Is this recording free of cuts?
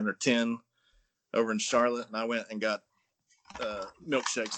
yes; 0 cuts

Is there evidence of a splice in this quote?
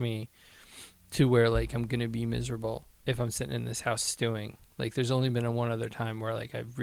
no; 0 cuts

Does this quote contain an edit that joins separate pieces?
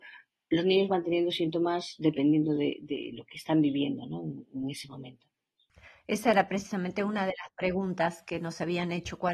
no; 0 cuts

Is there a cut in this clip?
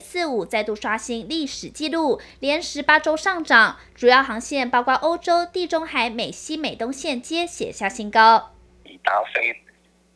no; 0 cuts

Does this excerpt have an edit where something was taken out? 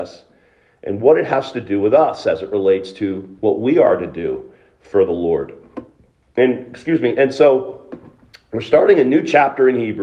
no; 0 cuts

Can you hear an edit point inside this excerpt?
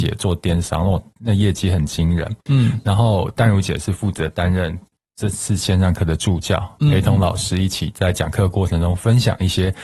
no; 0 cuts

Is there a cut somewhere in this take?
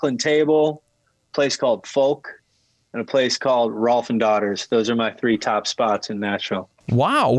no; 0 cuts

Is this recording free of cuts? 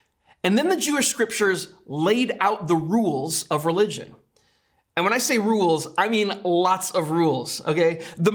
yes; 0 cuts

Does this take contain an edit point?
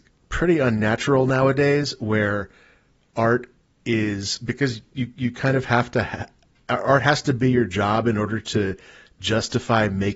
no; 0 cuts

